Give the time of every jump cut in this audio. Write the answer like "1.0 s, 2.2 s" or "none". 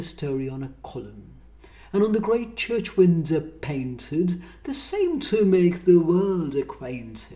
none